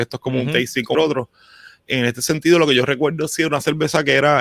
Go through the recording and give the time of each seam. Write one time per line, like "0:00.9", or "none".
0:00.9